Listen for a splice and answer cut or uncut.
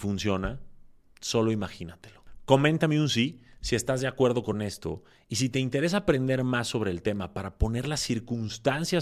uncut